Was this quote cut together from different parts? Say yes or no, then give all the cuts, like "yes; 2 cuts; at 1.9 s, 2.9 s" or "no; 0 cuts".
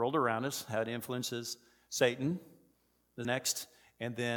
yes; 1 cut; at 3.2 s